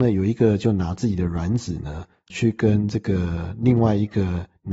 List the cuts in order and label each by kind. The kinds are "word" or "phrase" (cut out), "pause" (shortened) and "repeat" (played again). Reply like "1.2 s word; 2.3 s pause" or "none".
2.3 s word